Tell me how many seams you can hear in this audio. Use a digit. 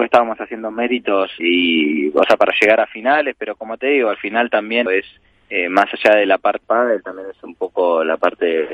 3